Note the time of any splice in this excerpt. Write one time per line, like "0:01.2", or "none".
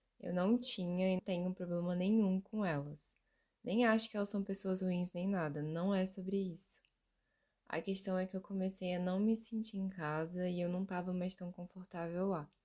0:01.2